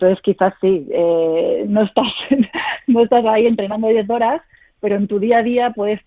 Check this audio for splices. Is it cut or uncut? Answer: uncut